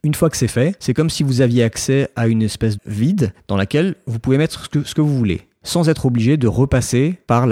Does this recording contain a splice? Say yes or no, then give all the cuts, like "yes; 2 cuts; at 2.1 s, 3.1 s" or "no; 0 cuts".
yes; 1 cut; at 2.8 s